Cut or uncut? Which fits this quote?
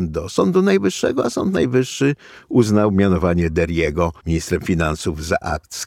cut